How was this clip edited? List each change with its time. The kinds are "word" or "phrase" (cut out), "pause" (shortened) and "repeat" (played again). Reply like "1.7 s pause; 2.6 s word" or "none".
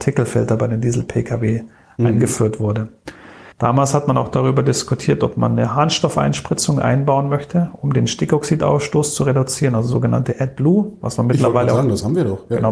3.5 s pause